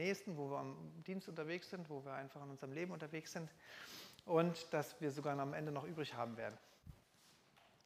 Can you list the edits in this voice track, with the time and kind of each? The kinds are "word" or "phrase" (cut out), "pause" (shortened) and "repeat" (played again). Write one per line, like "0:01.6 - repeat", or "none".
none